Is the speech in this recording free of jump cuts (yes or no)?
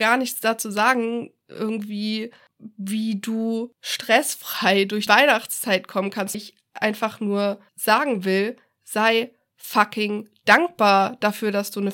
no